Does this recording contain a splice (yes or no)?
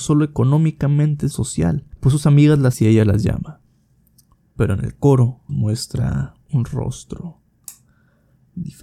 yes